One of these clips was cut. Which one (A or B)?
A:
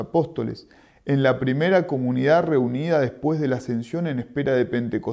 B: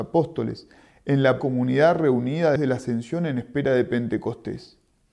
B